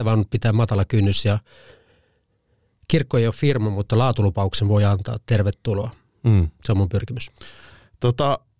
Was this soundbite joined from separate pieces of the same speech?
no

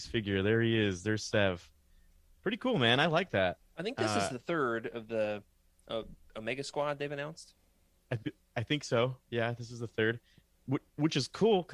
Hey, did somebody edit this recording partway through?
no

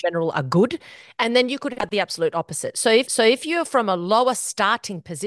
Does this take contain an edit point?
yes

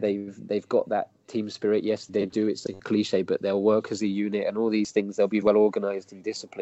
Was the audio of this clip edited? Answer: yes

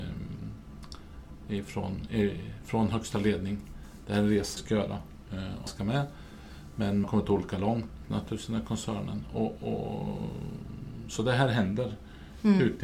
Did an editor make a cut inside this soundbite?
yes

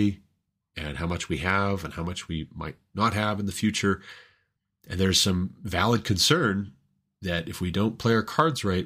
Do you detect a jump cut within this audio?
no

